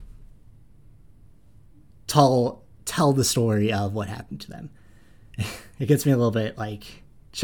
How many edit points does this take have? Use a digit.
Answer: 0